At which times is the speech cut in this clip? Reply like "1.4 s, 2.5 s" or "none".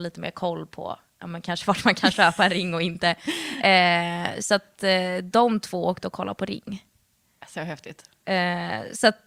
none

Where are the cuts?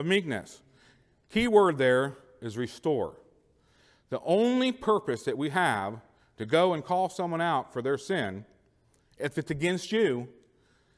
none

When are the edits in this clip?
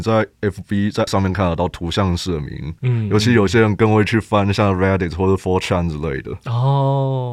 1.1 s

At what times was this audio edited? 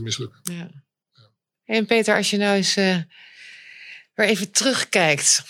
none

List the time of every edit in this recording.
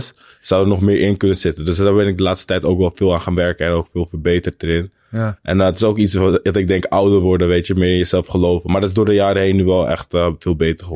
none

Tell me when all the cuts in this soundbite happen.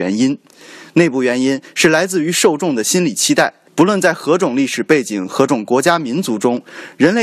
3.7 s

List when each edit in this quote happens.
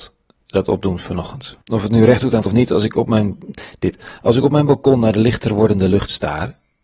1.6 s, 2.5 s

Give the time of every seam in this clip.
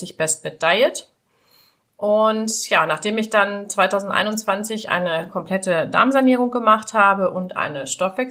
none

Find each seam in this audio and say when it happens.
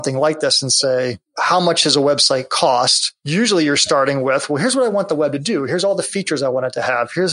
none

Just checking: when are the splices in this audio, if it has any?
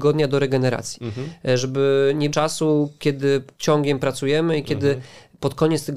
2.3 s, 3.6 s

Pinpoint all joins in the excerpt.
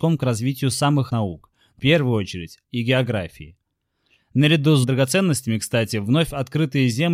1.1 s, 1.8 s, 2.6 s, 4.8 s

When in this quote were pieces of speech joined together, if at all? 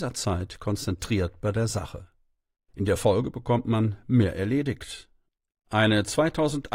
none

